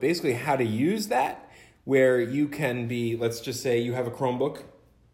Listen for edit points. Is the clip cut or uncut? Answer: uncut